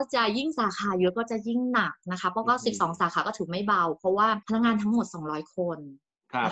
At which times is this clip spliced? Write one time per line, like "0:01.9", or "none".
0:04.4